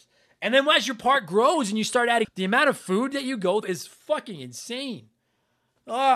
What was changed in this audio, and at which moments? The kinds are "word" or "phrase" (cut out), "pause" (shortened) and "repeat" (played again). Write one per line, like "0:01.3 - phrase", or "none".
0:02.2 - phrase
0:03.6 - word